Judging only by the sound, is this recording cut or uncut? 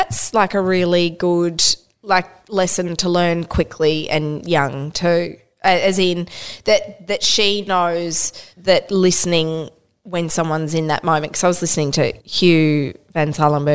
cut